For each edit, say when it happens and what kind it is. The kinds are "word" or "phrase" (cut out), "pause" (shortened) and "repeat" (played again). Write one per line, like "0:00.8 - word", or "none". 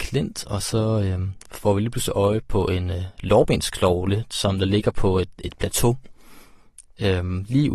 none